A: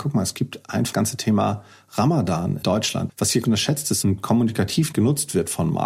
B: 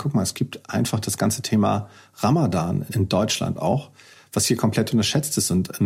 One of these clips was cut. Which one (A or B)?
A